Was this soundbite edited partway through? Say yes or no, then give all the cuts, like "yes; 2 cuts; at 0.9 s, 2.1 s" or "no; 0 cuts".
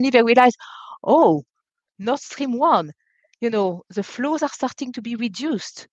no; 0 cuts